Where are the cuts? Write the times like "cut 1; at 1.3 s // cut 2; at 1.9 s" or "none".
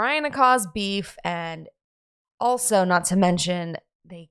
none

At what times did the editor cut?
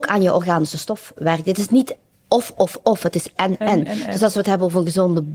cut 1; at 3.6 s

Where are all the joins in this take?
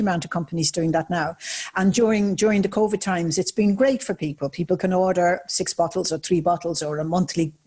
none

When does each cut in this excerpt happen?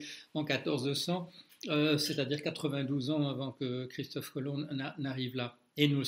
none

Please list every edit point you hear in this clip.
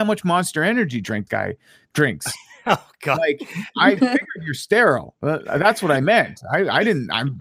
cut 1; at 1.3 s

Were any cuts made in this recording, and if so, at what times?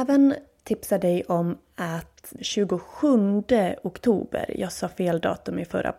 cut 1; at 2.4 s

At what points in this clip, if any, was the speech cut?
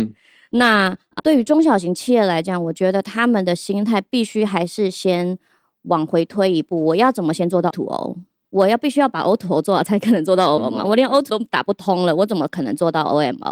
cut 1; at 1.2 s // cut 2; at 7.7 s // cut 3; at 10.6 s // cut 4; at 11.3 s

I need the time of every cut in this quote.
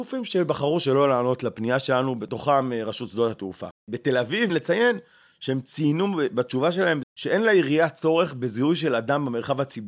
cut 1; at 3.8 s // cut 2; at 4.5 s // cut 3; at 7.0 s

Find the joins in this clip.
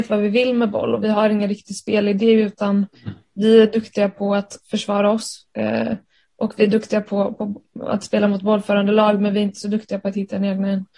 none

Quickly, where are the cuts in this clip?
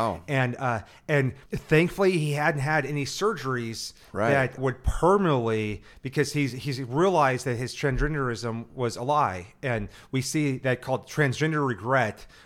cut 1; at 1.5 s // cut 2; at 4.6 s

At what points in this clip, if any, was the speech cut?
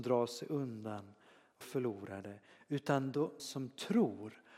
cut 1; at 1.6 s // cut 2; at 3.4 s

